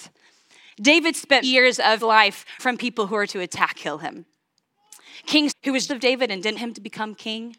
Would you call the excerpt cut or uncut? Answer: cut